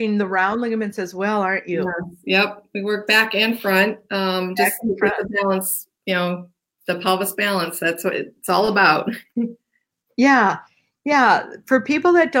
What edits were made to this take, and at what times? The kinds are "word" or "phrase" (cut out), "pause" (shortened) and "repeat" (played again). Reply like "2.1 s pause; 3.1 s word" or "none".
none